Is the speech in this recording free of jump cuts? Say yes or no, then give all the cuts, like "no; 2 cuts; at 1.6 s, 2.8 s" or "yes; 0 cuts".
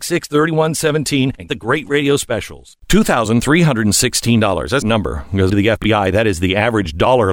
no; 3 cuts; at 1.5 s, 4.8 s, 5.5 s